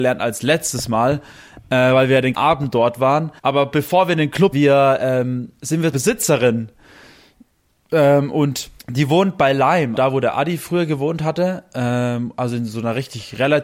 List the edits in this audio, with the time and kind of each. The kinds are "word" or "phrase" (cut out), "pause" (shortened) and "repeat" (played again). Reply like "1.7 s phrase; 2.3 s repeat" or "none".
2.3 s word; 3.4 s pause; 4.5 s phrase; 5.9 s phrase; 8.8 s pause; 10.0 s word